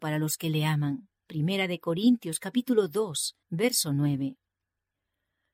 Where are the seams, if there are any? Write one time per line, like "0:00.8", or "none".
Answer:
0:01.2
0:03.4